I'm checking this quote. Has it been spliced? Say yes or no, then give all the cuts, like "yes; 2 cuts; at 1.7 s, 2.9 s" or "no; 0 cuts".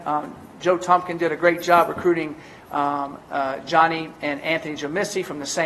no; 0 cuts